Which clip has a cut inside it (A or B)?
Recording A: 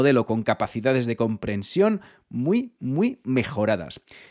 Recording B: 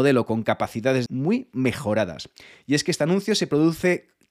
B